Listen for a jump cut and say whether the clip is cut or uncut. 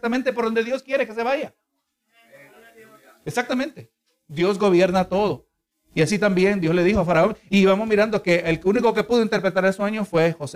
cut